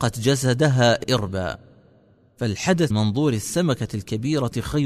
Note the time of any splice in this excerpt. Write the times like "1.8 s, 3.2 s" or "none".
1.0 s, 2.9 s